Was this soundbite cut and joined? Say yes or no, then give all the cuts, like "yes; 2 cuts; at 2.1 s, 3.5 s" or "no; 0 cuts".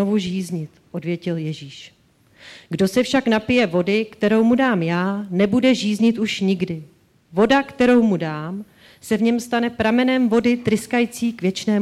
no; 0 cuts